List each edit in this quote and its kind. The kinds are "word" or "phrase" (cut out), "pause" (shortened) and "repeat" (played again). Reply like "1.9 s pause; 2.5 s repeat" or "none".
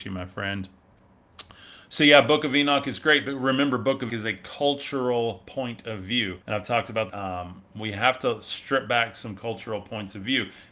4.1 s word; 6.4 s pause; 7.1 s phrase